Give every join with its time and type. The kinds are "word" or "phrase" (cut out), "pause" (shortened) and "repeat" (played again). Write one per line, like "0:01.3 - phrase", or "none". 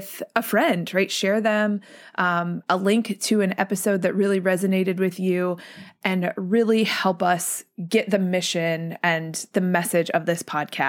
none

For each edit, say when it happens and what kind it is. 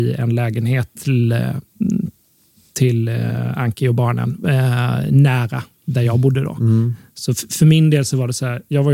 none

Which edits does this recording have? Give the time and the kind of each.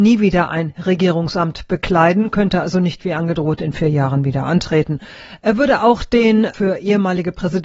none

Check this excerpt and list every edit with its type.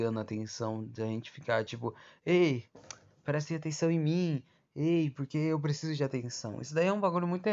none

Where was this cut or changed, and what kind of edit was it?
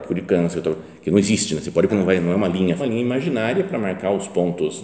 0:01.9 - word
0:02.8 - phrase

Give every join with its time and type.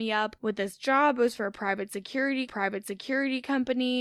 0:02.5 - repeat

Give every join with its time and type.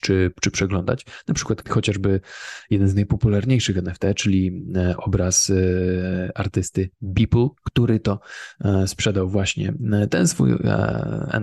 0:01.6 - phrase
0:07.6 - pause

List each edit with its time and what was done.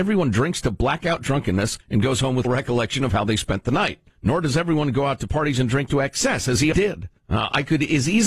0:01.8 - pause
0:02.4 - word
0:04.1 - pause
0:06.7 - word
0:07.2 - pause

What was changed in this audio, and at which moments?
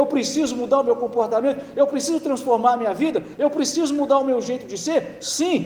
none

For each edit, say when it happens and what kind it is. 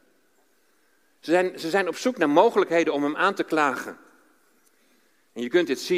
none

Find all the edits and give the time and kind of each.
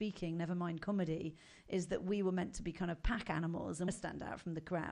0:03.9 - phrase

